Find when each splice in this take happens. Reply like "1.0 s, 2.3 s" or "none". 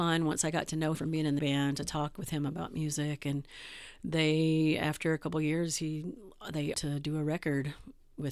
0.9 s, 1.4 s, 6.7 s